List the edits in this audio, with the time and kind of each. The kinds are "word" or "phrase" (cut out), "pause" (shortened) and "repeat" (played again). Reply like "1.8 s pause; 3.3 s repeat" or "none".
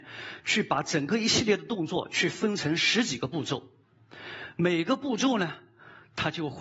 none